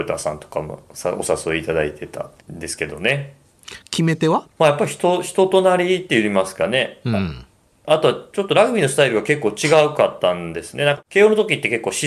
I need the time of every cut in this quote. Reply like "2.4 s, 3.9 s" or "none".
2.4 s, 4.5 s